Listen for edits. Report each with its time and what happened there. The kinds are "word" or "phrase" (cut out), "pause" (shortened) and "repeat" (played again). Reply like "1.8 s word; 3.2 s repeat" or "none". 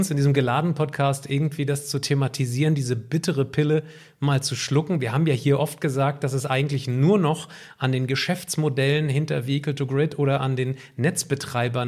none